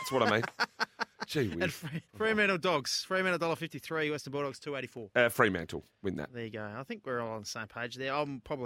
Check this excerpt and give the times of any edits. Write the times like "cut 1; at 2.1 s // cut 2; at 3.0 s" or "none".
cut 1; at 2.1 s